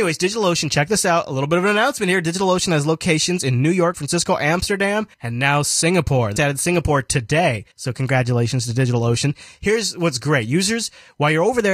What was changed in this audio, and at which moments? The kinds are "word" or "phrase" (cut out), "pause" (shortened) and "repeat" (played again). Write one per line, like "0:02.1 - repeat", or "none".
0:03.9 - word
0:05.1 - pause
0:06.4 - word
0:07.7 - pause